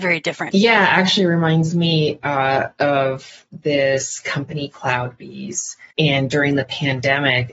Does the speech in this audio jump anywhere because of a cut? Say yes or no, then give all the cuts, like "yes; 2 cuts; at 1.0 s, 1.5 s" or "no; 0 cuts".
yes; 1 cut; at 5.9 s